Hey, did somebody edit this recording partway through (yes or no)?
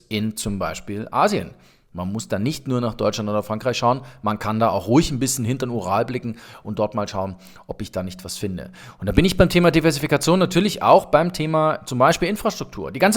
no